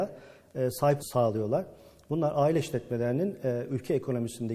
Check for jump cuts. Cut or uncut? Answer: cut